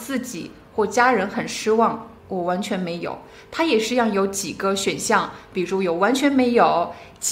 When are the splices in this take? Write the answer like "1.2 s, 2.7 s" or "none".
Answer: 2.2 s